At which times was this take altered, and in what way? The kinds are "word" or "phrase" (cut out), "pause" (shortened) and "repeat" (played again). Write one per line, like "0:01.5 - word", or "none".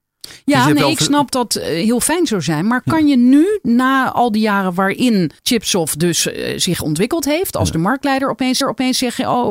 0:01.3 - word
0:05.4 - pause
0:08.6 - repeat